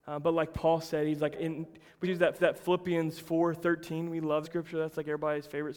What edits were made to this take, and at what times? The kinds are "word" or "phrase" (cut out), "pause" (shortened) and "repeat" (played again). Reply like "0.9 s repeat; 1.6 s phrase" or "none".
1.3 s word; 2.0 s word; 2.4 s repeat; 4.4 s word

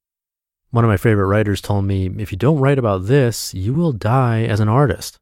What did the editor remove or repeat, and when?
none

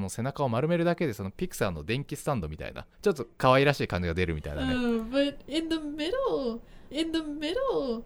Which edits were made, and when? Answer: 2.9 s pause; 6.9 s repeat

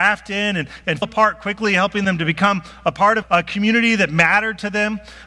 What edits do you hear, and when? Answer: 1.0 s word; 3.2 s word

